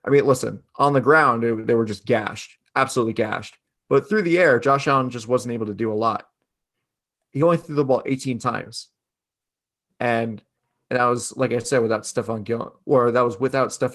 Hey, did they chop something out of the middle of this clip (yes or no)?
no